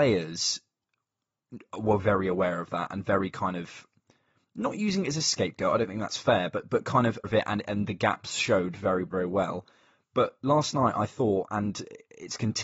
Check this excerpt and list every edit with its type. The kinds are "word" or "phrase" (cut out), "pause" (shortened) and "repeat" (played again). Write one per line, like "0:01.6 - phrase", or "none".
0:02.0 - word
0:07.2 - word
0:09.1 - word